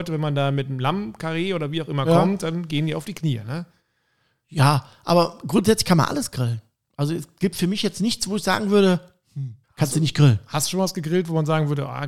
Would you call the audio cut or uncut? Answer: cut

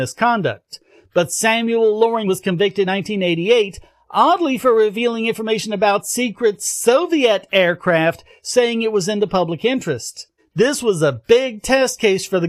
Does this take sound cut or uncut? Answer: cut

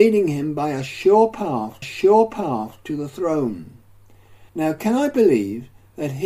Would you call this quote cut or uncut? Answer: cut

